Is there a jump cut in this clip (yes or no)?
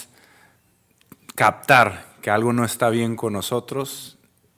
no